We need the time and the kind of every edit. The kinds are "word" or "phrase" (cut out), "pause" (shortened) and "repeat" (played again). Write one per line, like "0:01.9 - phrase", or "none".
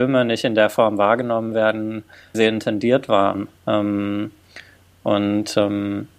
0:02.3 - phrase
0:03.5 - pause